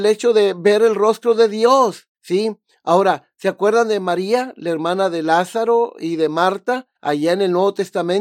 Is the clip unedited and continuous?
no; 2 cuts; at 2.1 s, 7.0 s

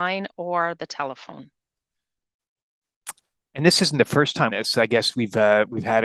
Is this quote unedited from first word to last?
no; 1 cut; at 4.5 s

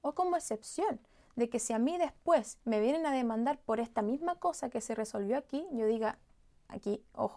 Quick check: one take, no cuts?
yes; 0 cuts

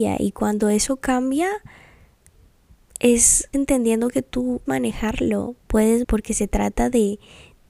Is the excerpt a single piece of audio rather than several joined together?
no; 3 cuts; at 3.5 s, 4.7 s, 6.0 s

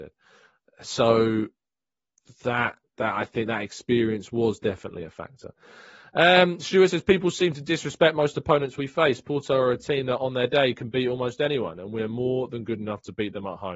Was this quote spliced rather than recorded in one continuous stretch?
no; 0 cuts

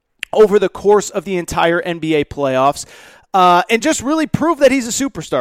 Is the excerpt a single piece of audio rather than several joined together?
yes; 0 cuts

